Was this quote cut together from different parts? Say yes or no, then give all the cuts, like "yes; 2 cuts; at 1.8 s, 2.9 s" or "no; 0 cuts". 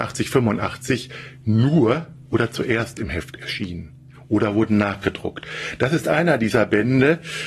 no; 0 cuts